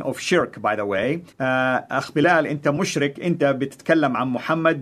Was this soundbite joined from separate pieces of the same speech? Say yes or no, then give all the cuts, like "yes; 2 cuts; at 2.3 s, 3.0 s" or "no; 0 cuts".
yes; 2 cuts; at 1.3 s, 3.2 s